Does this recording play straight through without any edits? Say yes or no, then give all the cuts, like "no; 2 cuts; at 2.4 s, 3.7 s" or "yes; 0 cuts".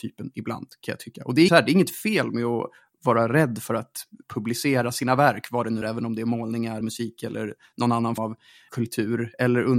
no; 6 cuts; at 1.5 s, 4.2 s, 5.8 s, 6.8 s, 8.2 s, 8.7 s